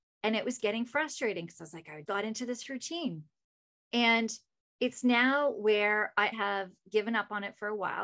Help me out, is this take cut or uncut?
cut